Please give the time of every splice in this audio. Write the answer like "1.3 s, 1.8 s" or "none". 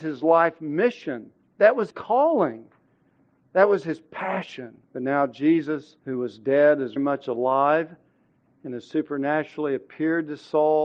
1.5 s, 1.9 s, 4.8 s, 6.0 s, 7.0 s